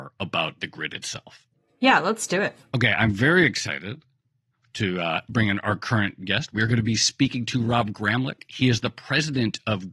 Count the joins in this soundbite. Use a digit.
0